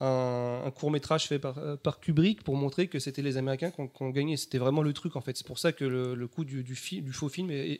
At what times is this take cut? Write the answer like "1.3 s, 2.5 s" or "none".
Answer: none